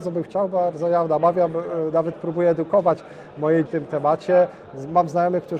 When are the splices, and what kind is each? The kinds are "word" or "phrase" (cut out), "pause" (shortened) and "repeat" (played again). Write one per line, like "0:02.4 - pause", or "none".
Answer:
0:03.7 - phrase

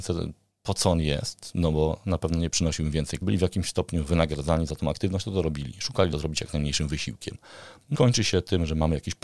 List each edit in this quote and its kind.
0:03.2 - phrase
0:06.1 - phrase
0:07.9 - word

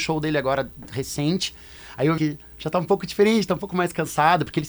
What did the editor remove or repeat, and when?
0:02.2 - word

